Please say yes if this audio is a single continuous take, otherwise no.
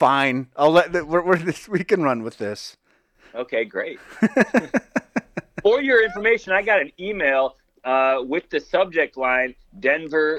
yes